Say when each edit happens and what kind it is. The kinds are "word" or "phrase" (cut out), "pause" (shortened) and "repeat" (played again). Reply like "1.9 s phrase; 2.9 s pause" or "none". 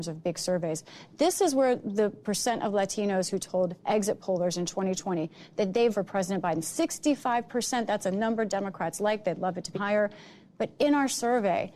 5.9 s word; 9.7 s word